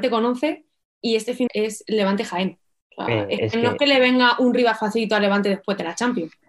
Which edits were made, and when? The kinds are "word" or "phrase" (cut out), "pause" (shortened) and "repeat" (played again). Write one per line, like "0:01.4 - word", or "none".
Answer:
0:01.5 - phrase

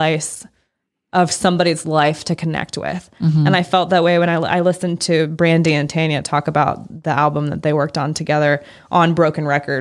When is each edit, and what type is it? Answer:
none

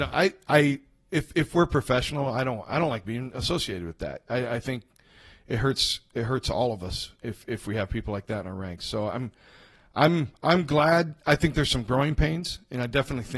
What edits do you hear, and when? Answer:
none

